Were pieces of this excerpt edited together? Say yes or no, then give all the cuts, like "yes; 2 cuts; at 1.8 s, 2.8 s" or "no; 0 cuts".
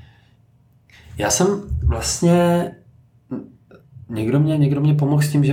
no; 0 cuts